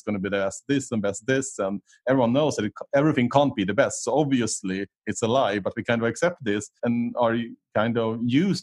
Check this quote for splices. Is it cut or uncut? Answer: cut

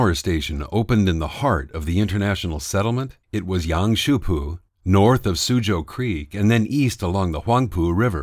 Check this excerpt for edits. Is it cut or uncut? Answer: cut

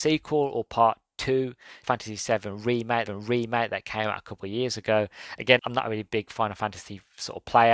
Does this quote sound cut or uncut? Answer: cut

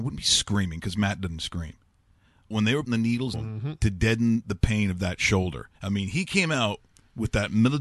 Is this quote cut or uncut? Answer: cut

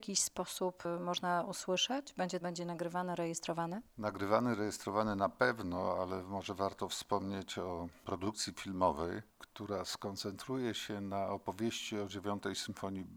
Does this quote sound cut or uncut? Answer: cut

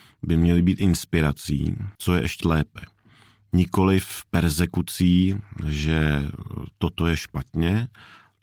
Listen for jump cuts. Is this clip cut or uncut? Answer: cut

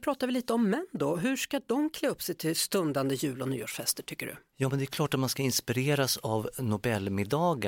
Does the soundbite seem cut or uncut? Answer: cut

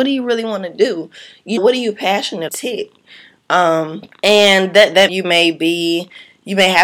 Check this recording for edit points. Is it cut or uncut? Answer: cut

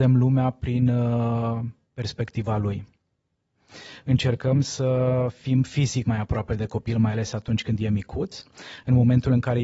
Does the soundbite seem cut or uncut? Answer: cut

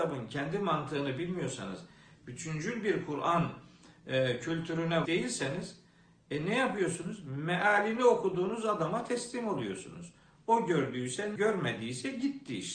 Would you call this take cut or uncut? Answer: cut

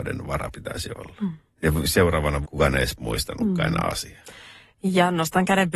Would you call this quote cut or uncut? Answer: cut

